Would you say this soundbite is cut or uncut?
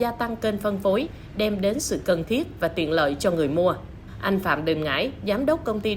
uncut